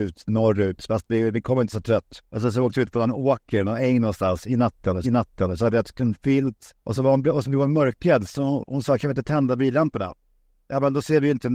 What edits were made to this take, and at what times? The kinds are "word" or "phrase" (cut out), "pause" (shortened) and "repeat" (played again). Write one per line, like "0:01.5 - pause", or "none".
0:01.7 - phrase
0:02.3 - pause
0:05.0 - repeat
0:06.8 - pause